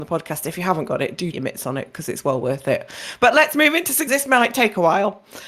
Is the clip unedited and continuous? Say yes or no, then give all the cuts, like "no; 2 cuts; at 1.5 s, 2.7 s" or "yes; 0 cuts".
no; 2 cuts; at 1.3 s, 4.1 s